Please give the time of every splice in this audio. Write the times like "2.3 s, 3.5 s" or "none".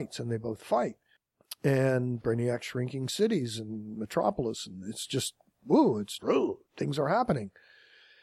2.2 s, 6.2 s